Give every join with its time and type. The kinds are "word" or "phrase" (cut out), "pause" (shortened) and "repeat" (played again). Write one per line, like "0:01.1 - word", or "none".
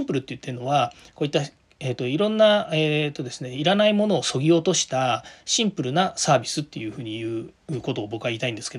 none